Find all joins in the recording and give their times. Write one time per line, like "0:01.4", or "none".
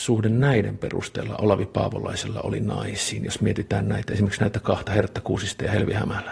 none